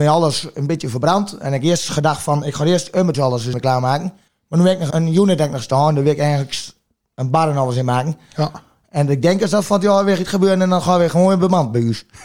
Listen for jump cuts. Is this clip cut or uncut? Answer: cut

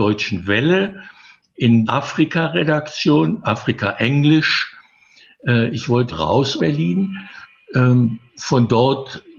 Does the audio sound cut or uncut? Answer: cut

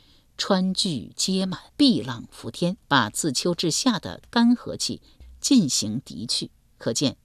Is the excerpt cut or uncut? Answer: cut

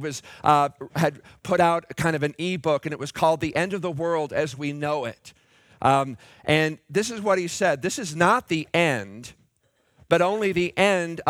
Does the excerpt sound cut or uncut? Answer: uncut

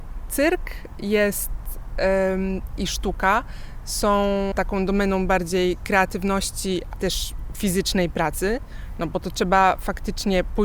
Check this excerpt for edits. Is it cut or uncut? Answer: cut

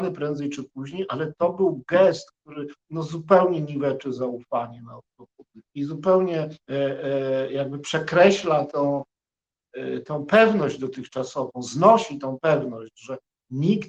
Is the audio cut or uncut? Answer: cut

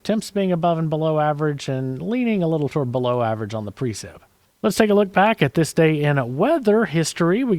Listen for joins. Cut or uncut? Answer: cut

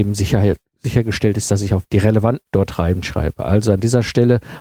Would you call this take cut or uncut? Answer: cut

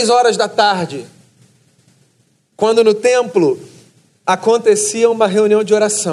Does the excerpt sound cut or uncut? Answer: uncut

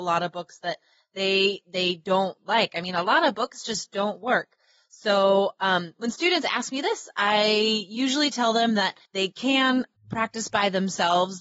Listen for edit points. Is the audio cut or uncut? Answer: cut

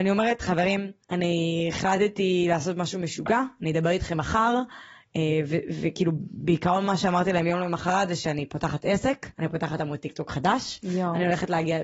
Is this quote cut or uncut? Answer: cut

